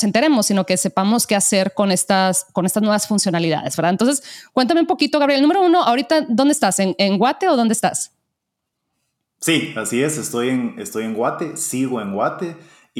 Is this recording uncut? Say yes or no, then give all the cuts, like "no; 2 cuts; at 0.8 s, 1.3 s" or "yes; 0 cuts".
yes; 0 cuts